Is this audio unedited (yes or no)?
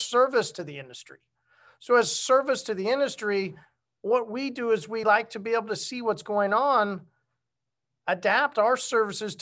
yes